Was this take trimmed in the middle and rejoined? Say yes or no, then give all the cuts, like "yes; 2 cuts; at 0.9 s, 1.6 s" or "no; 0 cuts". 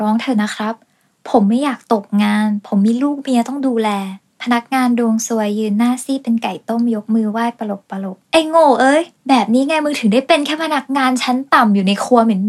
yes; 3 cuts; at 4.2 s, 8.2 s, 9.2 s